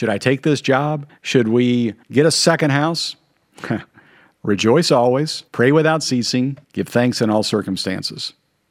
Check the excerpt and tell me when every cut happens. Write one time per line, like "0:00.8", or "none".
0:01.1
0:02.0
0:05.5
0:06.6